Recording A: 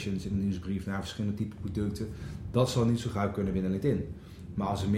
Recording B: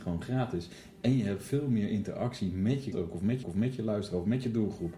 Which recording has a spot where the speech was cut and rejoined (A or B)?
B